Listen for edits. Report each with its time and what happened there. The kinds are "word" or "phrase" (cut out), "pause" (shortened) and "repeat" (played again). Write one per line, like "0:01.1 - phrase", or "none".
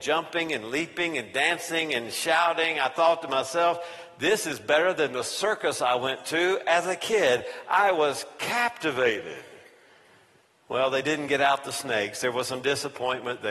none